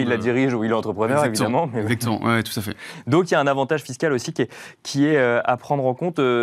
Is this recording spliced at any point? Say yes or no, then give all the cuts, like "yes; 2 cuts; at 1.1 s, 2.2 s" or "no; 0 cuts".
no; 0 cuts